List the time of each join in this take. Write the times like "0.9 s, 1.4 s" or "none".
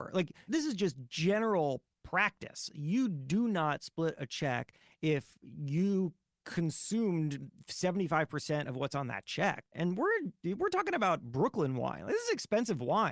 none